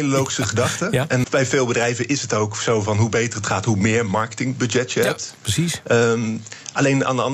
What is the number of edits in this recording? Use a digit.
1